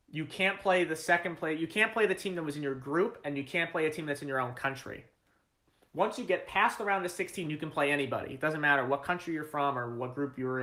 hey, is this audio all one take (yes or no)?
yes